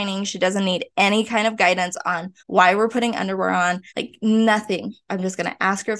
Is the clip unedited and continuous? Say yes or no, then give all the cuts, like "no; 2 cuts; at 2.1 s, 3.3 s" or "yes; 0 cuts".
no; 2 cuts; at 2.4 s, 3.9 s